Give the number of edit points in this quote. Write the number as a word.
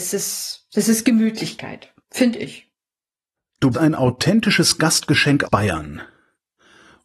three